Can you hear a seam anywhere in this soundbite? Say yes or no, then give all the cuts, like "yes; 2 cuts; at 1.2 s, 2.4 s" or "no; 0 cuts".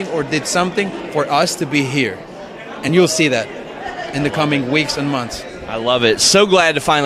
no; 0 cuts